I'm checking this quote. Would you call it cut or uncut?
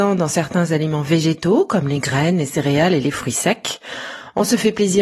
uncut